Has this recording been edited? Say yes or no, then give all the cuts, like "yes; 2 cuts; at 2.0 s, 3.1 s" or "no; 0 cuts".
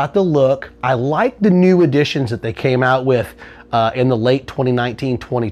no; 0 cuts